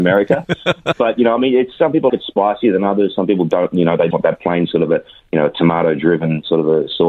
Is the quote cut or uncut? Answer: cut